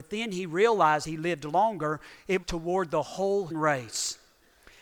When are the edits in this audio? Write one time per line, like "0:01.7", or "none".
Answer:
0:01.0
0:02.4
0:03.5

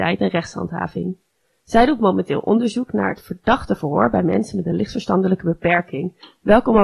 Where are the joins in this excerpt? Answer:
none

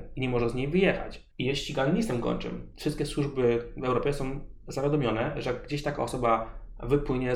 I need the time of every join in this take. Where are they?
0:01.3

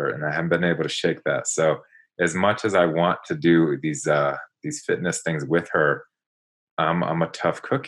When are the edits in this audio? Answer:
none

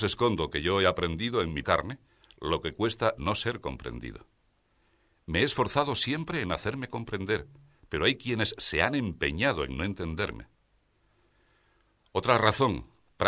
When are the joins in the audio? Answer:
0:01.6
0:03.2

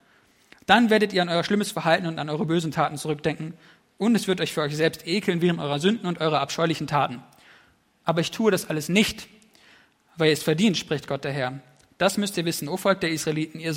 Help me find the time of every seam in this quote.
none

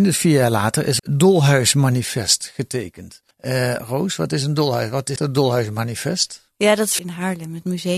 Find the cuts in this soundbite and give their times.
0:01.0
0:03.3
0:05.2
0:07.0

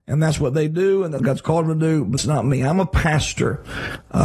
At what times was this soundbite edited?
0:01.2
0:02.2

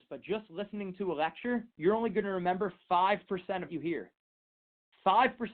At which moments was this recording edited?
0:01.7
0:03.7

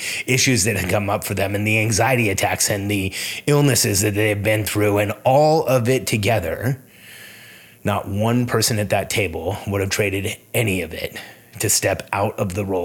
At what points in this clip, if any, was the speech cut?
none

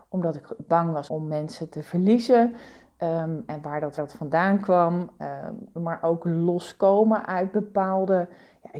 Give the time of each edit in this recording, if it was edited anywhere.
0:01.1
0:04.0

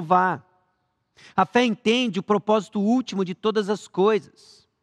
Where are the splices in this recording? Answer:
none

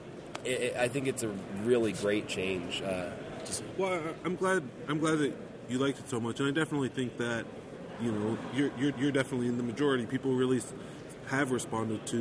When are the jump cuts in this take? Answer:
0:08.9

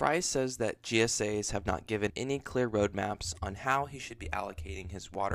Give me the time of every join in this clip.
0:02.1

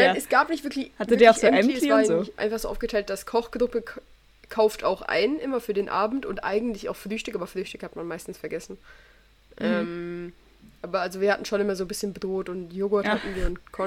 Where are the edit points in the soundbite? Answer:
none

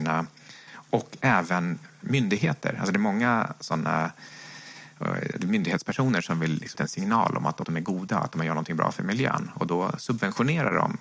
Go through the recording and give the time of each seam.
0:06.7
0:07.6

